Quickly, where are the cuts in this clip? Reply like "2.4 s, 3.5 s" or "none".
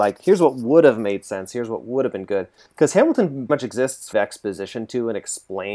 3.5 s, 4.1 s

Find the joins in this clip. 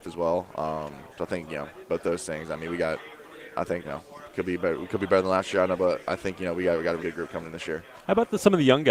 1.1 s, 3.8 s, 7.0 s

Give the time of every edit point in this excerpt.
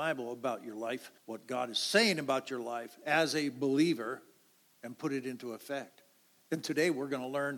1.2 s

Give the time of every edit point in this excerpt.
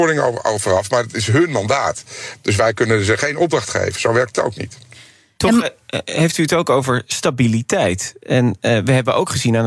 none

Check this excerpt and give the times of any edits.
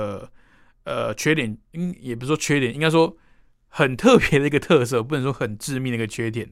none

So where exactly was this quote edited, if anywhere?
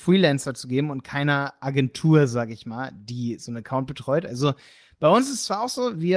none

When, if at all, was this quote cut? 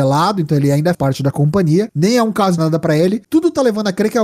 0.9 s, 2.6 s

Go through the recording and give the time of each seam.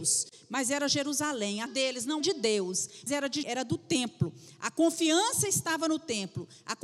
1.7 s, 2.2 s, 3.1 s, 3.4 s

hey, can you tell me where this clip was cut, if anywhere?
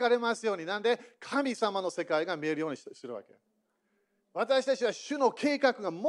none

